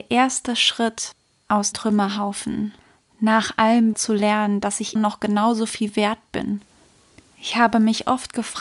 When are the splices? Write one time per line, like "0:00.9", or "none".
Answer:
0:01.7
0:03.9
0:05.0